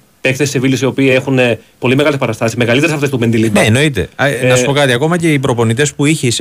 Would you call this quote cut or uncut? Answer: uncut